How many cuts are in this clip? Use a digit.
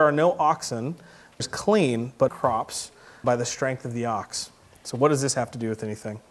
3